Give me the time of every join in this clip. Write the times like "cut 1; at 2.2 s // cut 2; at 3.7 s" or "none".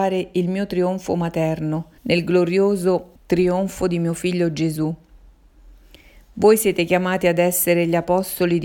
cut 1; at 2.0 s // cut 2; at 3.2 s